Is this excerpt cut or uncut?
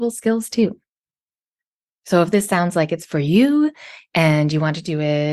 uncut